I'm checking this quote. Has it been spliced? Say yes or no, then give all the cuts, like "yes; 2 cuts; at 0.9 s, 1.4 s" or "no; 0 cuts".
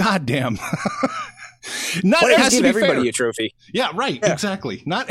yes; 1 cut; at 2.4 s